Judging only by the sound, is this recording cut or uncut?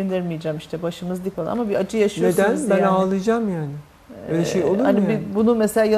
cut